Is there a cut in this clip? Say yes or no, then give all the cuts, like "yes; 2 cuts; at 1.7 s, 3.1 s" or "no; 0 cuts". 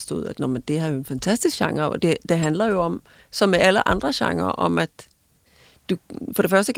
no; 0 cuts